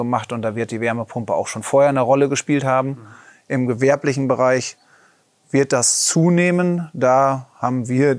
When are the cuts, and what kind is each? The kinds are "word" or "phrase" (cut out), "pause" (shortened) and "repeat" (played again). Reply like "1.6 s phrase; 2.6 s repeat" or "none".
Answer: none